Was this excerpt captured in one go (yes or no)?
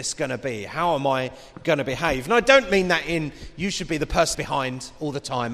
no